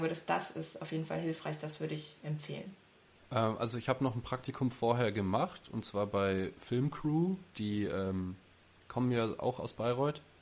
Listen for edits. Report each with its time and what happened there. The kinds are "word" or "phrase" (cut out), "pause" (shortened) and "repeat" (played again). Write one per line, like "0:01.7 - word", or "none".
none